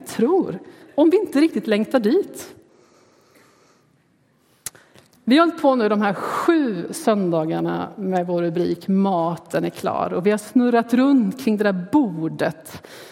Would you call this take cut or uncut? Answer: uncut